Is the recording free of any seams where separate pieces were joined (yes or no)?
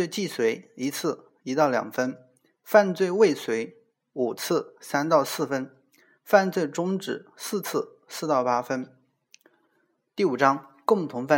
yes